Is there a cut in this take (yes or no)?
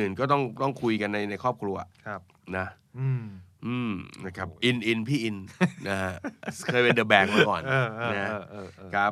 yes